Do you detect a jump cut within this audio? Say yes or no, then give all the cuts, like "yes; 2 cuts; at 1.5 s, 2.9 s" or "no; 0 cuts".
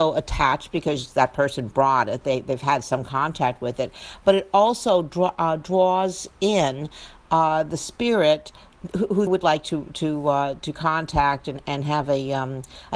yes; 1 cut; at 9.3 s